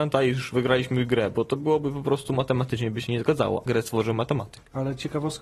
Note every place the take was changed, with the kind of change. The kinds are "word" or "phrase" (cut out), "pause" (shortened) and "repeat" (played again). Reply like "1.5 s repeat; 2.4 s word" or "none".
3.7 s word